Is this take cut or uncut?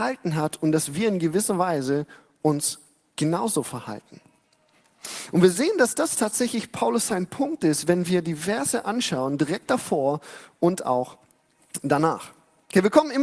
uncut